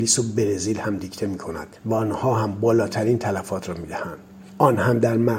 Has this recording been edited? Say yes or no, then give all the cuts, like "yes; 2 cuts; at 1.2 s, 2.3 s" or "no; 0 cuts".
no; 0 cuts